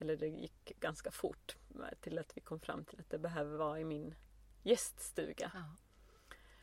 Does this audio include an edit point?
no; 0 cuts

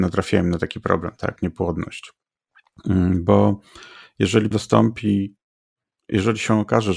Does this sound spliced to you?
yes; 2 cuts; at 1.4 s, 4.5 s

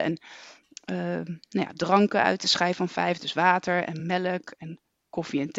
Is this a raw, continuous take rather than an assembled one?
yes; 0 cuts

